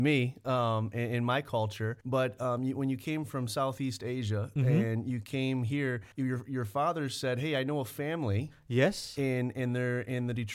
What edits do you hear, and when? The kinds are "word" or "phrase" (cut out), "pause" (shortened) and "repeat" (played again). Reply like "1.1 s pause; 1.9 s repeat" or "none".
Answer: 2.0 s pause; 6.1 s pause